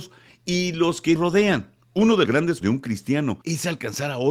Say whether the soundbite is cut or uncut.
cut